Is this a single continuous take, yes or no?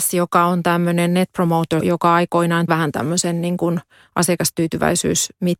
no